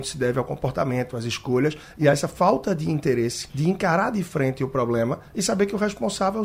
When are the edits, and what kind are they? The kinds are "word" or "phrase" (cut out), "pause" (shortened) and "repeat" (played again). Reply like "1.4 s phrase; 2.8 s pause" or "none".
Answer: 3.5 s pause